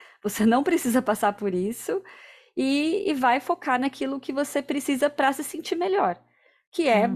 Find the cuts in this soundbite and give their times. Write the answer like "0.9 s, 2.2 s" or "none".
none

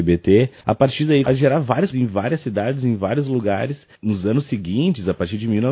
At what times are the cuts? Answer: 1.2 s, 1.9 s

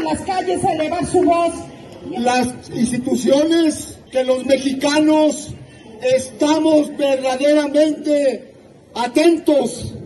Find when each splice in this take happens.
4.1 s, 8.7 s

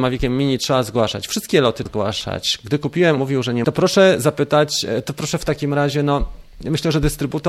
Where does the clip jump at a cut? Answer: 1.9 s, 3.2 s, 3.6 s

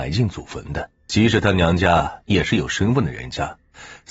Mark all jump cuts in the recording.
1.0 s

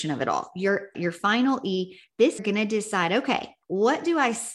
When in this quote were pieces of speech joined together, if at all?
0.9 s, 2.4 s, 3.6 s

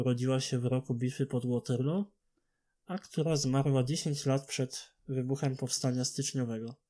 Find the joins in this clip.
none

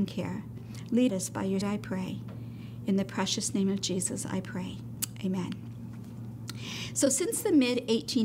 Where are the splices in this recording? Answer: 1.1 s, 1.6 s

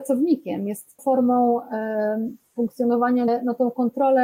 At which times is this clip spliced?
1.0 s, 3.3 s

